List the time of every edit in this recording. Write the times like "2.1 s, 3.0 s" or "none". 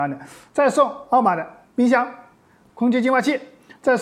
2.7 s